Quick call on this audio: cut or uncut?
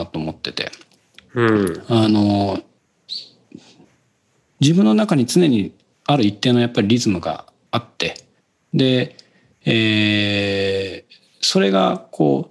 uncut